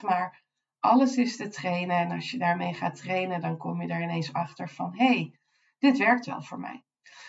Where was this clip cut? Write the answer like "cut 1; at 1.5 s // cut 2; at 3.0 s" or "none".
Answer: none